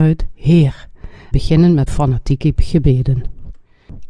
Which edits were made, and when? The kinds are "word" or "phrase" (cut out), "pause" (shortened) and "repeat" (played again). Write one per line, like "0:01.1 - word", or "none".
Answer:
0:01.3 - word
0:01.9 - word